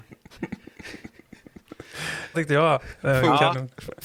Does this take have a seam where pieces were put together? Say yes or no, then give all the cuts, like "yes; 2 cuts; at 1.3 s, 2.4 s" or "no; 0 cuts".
yes; 1 cut; at 2.3 s